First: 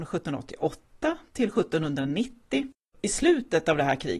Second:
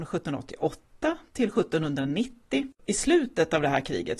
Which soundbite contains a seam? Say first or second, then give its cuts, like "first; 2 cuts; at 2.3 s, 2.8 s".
second; 1 cut; at 2.7 s